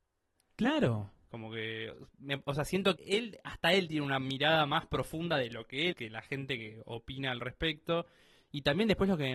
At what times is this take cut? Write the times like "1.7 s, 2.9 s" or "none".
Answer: 3.0 s, 5.9 s